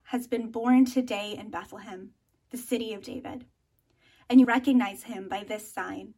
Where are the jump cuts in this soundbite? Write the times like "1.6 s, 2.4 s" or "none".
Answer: 4.4 s